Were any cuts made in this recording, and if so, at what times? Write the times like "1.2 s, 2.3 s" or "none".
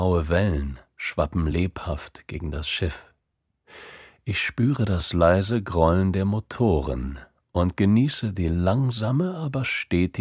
none